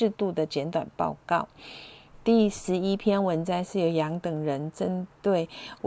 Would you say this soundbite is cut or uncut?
uncut